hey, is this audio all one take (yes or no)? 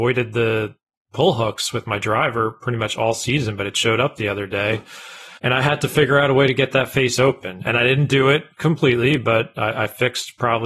no